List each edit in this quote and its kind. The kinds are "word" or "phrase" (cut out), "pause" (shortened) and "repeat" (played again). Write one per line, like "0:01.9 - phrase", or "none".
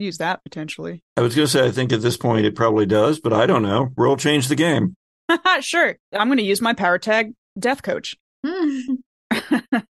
none